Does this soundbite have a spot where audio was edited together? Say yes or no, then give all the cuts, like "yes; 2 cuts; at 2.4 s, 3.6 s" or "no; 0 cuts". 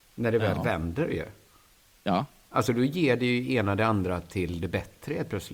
no; 0 cuts